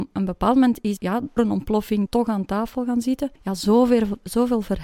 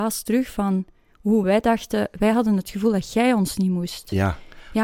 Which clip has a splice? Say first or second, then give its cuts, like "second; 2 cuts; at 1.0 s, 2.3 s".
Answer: first; 4 cuts; at 1.0 s, 1.4 s, 2.1 s, 3.4 s